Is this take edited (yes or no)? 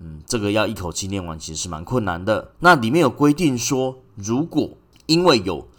yes